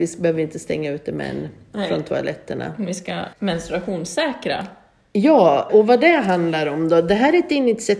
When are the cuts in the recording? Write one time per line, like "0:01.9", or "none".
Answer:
0:03.3
0:05.7

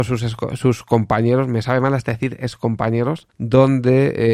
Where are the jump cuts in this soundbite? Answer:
0:03.3

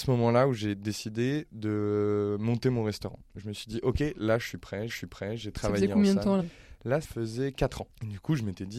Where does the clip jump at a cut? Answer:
0:04.9
0:06.4
0:07.0

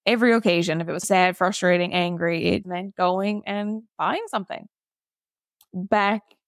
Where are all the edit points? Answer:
0:01.0
0:02.6
0:03.9

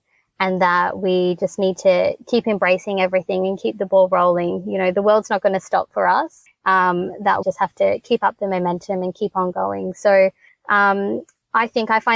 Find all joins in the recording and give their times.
0:07.4

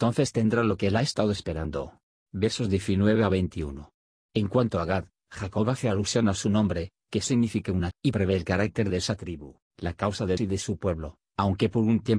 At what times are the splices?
0:02.1
0:07.9
0:09.6
0:10.4

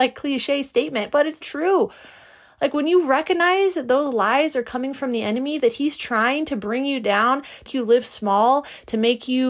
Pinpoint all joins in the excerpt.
0:01.4
0:07.7

